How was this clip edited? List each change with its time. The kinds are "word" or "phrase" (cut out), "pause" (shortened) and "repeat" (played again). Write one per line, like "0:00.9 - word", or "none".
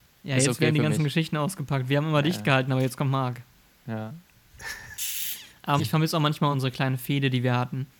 0:05.8 - word
0:06.5 - word